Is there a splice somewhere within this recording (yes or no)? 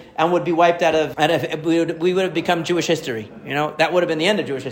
yes